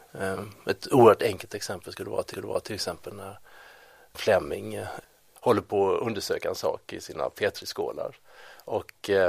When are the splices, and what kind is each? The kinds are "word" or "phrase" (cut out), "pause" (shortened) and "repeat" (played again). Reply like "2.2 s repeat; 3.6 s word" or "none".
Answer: 2.3 s repeat